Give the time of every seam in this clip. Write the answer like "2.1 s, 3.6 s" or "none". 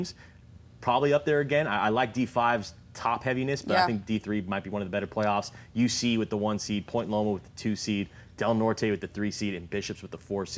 none